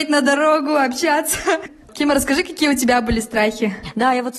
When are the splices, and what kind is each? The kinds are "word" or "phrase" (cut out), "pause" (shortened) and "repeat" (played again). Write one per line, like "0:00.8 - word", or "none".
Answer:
none